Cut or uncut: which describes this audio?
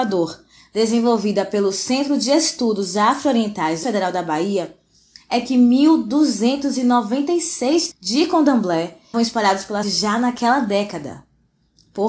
cut